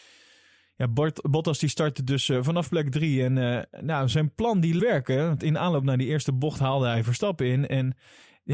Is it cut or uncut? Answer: cut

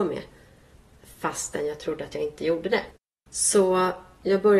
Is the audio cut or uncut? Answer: uncut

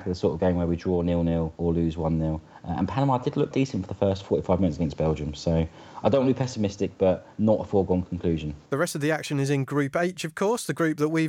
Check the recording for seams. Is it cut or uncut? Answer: cut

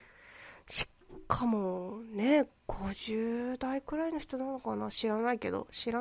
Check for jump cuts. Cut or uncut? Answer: uncut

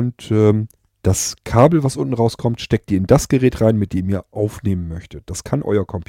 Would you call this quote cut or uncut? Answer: uncut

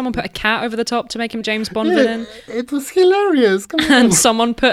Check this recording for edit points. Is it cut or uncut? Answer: cut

